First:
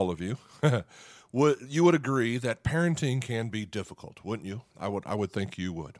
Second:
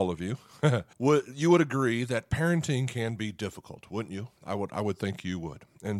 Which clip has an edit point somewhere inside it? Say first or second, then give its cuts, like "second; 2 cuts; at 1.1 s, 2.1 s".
second; 1 cut; at 0.9 s